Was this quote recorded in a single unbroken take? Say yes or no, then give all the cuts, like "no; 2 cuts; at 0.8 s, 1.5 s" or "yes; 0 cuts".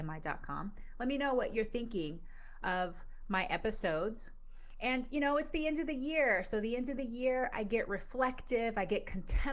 yes; 0 cuts